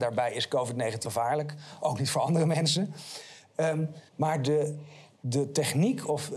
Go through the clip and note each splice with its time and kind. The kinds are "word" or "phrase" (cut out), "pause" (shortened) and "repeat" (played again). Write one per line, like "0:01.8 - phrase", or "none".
0:01.0 - word
0:04.1 - pause